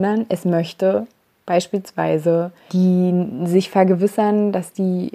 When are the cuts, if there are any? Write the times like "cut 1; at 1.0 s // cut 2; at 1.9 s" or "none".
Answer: cut 1; at 2.7 s